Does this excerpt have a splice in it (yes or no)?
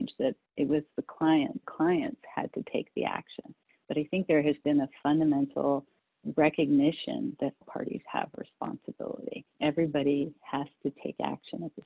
yes